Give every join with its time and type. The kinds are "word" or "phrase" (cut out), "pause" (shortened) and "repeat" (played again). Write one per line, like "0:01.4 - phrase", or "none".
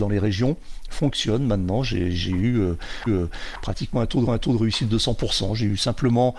0:03.1 - repeat
0:04.3 - repeat